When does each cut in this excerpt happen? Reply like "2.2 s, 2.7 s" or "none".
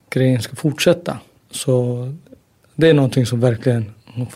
none